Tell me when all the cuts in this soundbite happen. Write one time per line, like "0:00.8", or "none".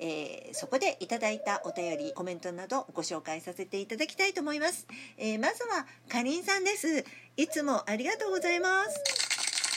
0:02.1

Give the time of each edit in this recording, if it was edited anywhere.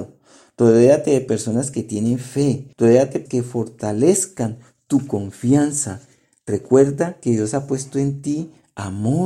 0:02.7
0:03.3

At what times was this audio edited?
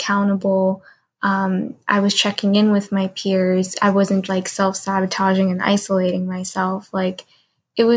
0:04.3

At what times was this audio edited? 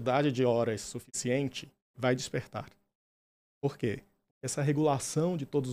0:01.9

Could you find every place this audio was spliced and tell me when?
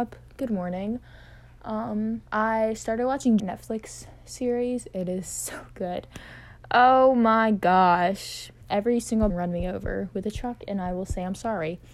0:02.3
0:03.4
0:08.6
0:09.3

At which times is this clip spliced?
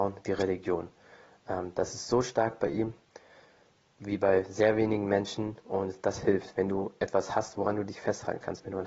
none

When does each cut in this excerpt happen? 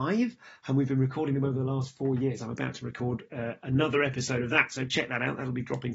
none

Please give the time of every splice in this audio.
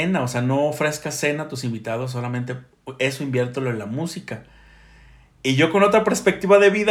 none

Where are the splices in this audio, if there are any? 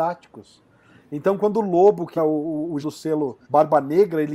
0:02.2
0:02.8
0:03.4

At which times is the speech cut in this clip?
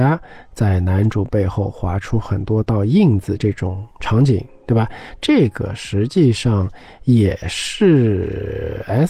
0:03.9

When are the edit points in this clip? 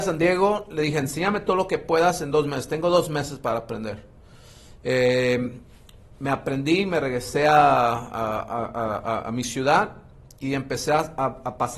none

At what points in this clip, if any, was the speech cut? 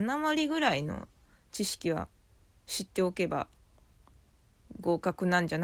none

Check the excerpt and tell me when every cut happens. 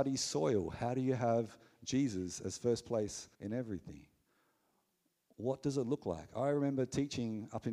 0:03.3

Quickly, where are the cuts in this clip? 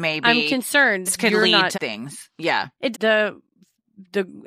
0:01.1
0:01.7
0:02.9

